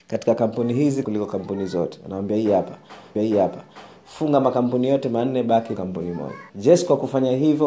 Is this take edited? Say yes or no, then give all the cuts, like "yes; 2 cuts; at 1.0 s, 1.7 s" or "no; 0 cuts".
yes; 4 cuts; at 1.0 s, 3.2 s, 5.8 s, 6.5 s